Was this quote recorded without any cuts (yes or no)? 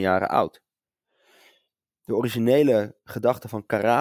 yes